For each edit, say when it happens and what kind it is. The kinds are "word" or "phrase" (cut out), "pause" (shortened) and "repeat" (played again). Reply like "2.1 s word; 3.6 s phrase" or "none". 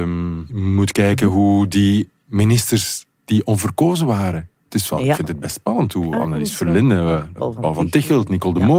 7.4 s word